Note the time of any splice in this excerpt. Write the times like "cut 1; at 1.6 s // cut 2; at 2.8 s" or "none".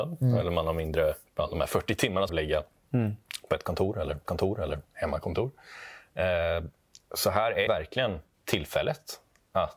cut 1; at 1.3 s // cut 2; at 2.3 s // cut 3; at 4.3 s // cut 4; at 7.0 s // cut 5; at 7.7 s // cut 6; at 8.3 s